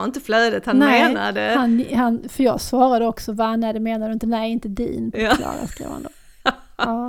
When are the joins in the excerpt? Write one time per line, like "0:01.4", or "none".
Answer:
0:05.1

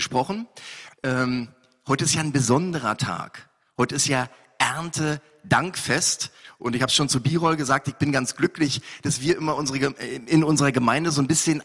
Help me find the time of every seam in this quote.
none

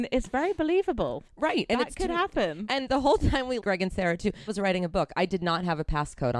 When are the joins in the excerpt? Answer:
0:01.3
0:03.6
0:04.5

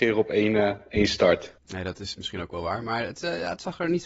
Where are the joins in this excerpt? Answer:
0:01.6

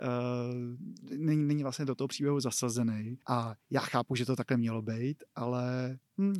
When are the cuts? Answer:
0:03.2

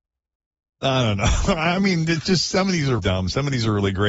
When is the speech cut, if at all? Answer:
0:03.0

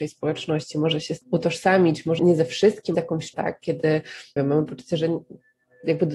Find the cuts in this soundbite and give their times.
0:01.2
0:02.2
0:02.9
0:03.3
0:04.4

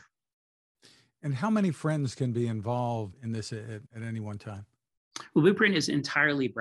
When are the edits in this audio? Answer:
0:03.1
0:03.9

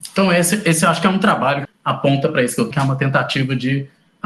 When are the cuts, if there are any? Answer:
0:01.6
0:02.7

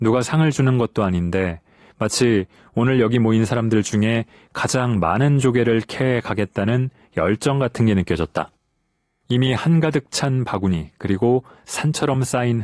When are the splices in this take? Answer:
none

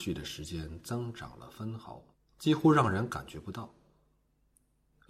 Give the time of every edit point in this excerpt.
0:02.1

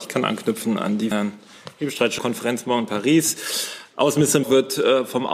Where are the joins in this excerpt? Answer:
0:01.1
0:02.2
0:04.4

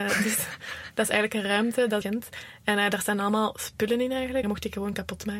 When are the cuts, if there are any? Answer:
0:02.0
0:04.4

